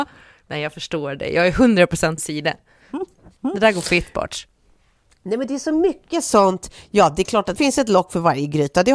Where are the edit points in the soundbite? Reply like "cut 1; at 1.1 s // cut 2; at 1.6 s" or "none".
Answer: cut 1; at 2.2 s // cut 2; at 7.6 s